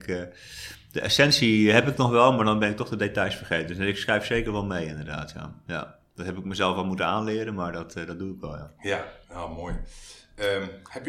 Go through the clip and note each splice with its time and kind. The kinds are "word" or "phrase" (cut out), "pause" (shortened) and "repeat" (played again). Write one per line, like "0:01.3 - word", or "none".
0:09.2 - pause